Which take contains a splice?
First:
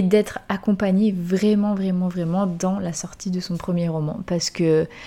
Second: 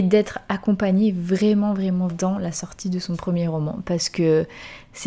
second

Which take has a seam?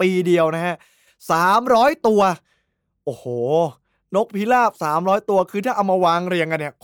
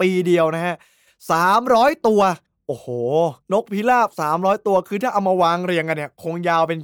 second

